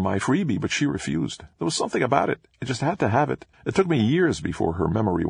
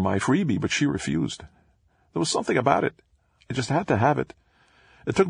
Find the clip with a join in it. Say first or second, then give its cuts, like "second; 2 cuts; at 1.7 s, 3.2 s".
first; 3 cuts; at 1.5 s, 2.5 s, 3.5 s